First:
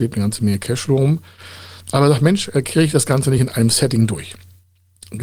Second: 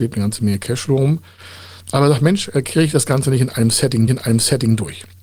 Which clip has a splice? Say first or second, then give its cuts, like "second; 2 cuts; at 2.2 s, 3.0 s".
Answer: second; 1 cut; at 4.1 s